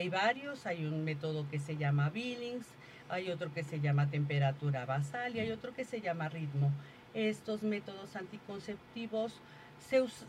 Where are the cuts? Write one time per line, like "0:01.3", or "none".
none